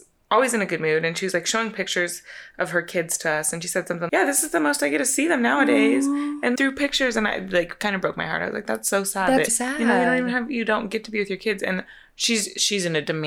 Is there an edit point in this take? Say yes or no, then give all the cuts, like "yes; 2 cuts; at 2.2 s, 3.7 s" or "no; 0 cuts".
yes; 3 cuts; at 4.1 s, 6.6 s, 9.5 s